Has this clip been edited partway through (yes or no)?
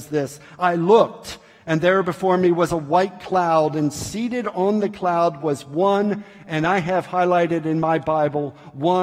no